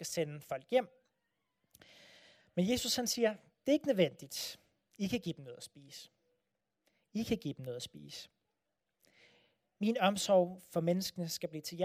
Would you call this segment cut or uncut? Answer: uncut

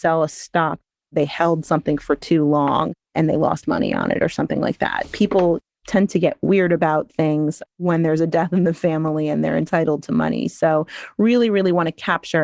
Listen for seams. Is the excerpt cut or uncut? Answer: cut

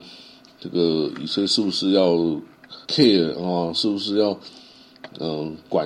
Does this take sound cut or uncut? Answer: cut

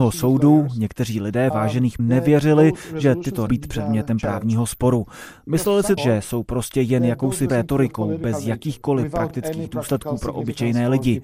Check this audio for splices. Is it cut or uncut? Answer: cut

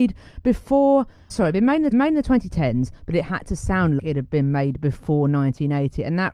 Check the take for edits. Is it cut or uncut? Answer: cut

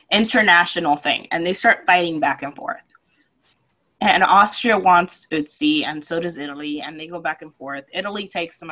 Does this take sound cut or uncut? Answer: uncut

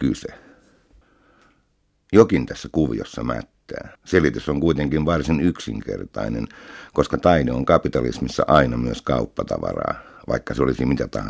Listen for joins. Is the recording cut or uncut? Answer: cut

